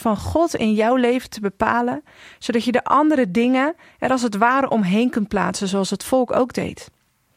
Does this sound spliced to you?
no; 0 cuts

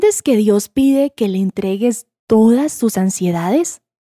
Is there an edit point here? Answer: no; 0 cuts

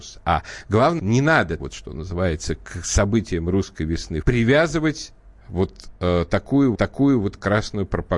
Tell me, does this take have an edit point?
yes; 4 cuts; at 1.0 s, 1.6 s, 4.2 s, 6.7 s

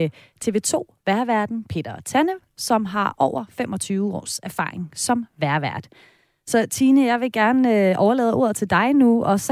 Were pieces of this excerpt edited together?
no; 0 cuts

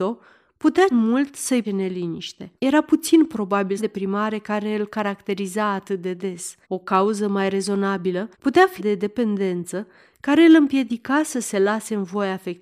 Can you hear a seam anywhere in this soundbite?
yes; 7 cuts; at 0.9 s, 1.6 s, 2.6 s, 3.8 s, 6.6 s, 8.3 s, 8.8 s

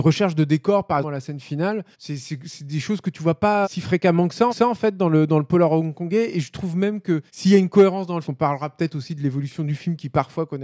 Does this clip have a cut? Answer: yes; 6 cuts; at 1.0 s, 1.9 s, 3.6 s, 4.5 s, 7.3 s, 8.2 s

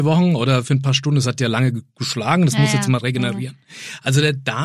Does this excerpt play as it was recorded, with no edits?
yes; 0 cuts

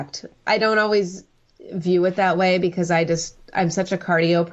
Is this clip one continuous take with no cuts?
yes; 0 cuts

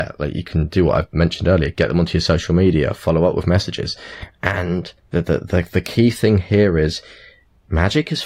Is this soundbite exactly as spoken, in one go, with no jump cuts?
no; 1 cut; at 5.0 s

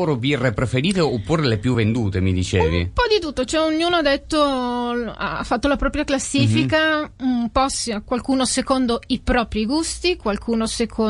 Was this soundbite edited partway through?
no; 0 cuts

